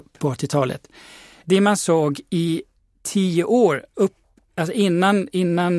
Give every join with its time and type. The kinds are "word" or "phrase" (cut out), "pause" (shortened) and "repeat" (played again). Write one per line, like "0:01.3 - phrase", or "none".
none